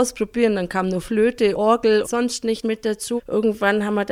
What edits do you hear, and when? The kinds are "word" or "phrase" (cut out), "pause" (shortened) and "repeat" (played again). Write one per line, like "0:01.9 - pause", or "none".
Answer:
0:01.5 - word
0:02.0 - word
0:02.6 - word
0:03.2 - word